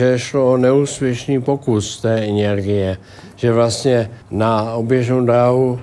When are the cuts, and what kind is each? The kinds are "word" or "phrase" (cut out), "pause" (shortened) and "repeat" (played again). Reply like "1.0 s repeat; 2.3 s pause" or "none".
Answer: 4.2 s pause